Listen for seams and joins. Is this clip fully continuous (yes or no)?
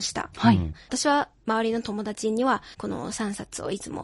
no